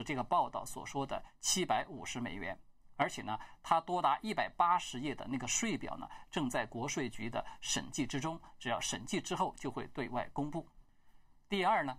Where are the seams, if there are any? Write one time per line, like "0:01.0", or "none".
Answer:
none